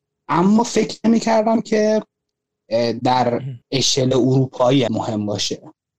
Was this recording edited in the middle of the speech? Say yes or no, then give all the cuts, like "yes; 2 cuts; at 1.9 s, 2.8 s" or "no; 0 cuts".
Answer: yes; 2 cuts; at 3.6 s, 4.9 s